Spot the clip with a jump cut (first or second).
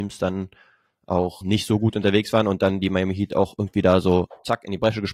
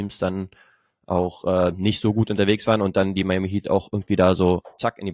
first